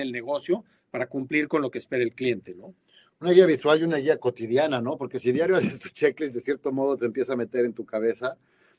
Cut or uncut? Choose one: uncut